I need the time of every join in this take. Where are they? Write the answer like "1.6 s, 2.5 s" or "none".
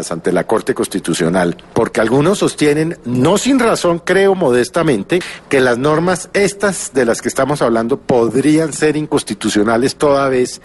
none

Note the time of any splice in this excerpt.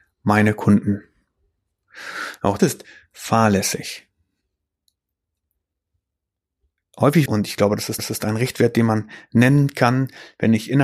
2.6 s, 7.3 s, 8.0 s

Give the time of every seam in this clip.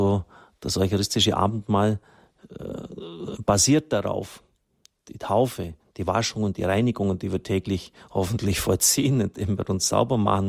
none

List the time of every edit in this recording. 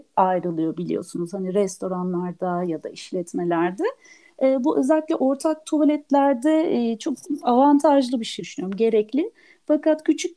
8.4 s

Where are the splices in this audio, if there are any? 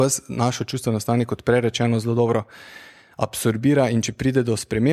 none

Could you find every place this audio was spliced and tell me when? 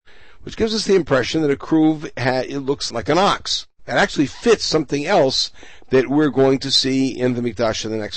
2.9 s

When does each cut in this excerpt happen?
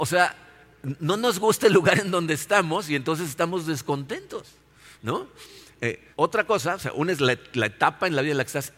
6.1 s

